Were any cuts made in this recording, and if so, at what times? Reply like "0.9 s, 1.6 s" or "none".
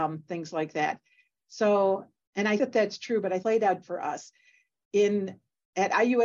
2.2 s, 2.6 s, 3.4 s, 3.8 s